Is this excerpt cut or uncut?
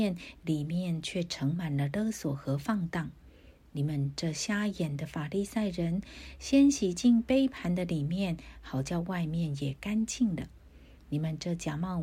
uncut